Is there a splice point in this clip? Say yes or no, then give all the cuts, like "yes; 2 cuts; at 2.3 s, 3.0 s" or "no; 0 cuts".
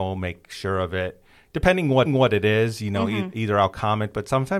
yes; 1 cut; at 2.1 s